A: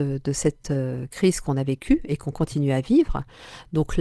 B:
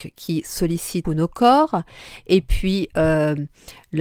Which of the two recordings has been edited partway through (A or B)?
B